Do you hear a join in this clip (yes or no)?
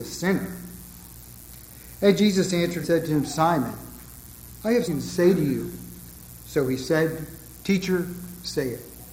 yes